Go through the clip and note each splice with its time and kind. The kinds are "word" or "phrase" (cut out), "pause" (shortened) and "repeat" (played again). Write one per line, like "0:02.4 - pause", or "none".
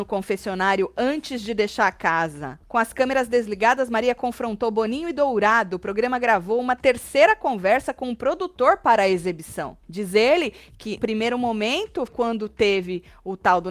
0:02.6 - pause
0:09.8 - pause
0:11.0 - word
0:12.1 - word